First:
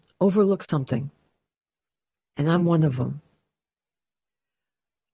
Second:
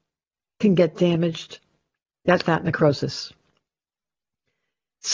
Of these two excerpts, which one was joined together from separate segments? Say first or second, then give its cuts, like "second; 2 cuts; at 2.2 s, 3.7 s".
second; 1 cut; at 2.4 s